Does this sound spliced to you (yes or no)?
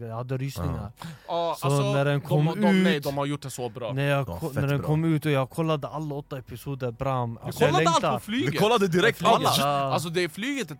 no